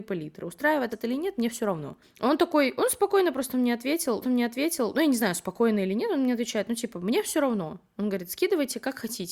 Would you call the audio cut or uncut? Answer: cut